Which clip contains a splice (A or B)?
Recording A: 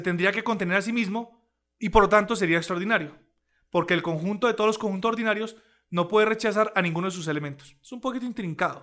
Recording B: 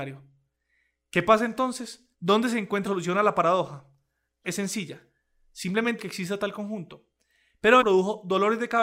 B